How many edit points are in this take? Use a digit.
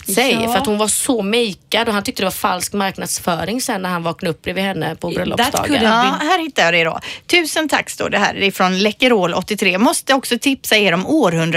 0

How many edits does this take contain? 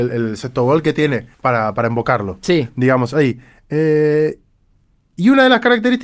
1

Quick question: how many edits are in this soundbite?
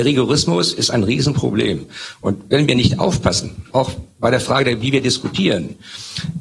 1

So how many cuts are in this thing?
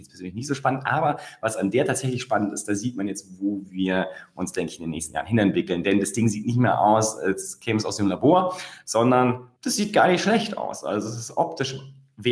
1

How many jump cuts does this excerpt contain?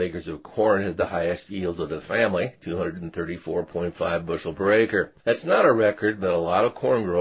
1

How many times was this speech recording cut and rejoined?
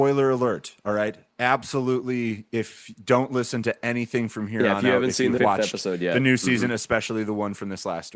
1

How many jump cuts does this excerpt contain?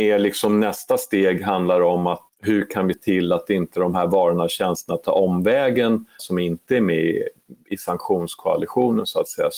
3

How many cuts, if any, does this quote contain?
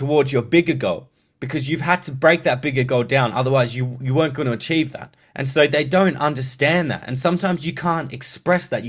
1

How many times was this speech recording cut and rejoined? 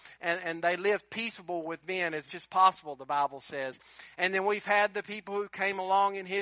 1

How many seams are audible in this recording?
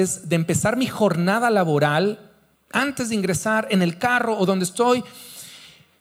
1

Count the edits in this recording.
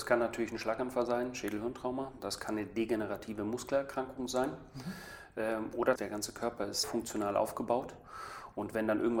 2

